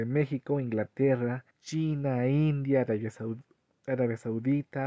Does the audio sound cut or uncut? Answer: cut